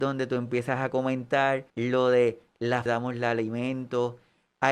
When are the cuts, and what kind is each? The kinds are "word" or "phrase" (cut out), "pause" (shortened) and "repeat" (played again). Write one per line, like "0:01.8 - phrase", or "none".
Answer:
0:01.7 - pause
0:02.9 - phrase